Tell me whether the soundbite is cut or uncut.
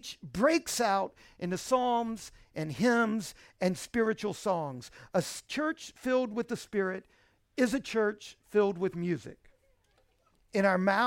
uncut